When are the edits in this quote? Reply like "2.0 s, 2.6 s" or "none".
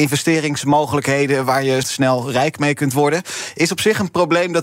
1.8 s